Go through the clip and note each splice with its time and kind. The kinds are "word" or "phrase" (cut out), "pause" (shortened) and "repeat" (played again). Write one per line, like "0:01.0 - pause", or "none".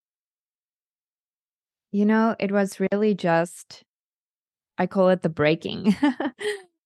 none